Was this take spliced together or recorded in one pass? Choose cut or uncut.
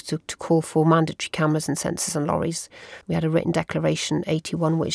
cut